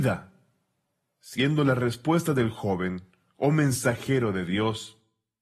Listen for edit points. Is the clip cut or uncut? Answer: uncut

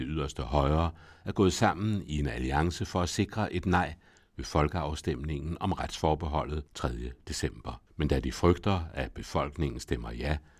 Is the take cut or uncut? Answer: cut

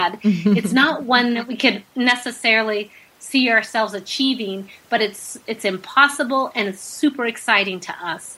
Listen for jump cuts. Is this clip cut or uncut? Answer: uncut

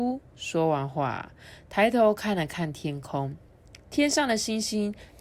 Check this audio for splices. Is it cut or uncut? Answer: uncut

